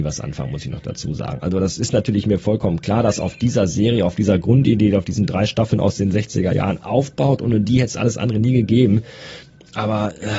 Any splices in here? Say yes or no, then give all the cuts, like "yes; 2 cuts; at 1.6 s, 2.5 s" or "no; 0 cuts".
yes; 1 cut; at 6.8 s